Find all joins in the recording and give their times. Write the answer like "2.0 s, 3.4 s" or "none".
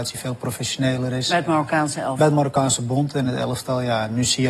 none